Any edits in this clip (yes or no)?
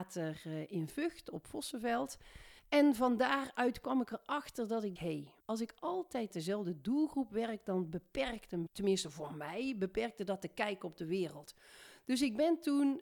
yes